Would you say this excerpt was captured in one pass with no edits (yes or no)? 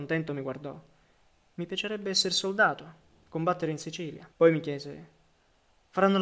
no